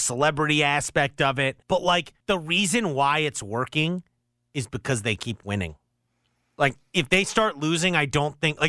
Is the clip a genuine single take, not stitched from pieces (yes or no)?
no